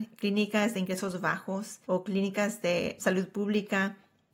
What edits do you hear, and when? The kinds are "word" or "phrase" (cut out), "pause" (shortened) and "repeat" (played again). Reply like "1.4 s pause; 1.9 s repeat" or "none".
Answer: 1.8 s pause; 3.0 s word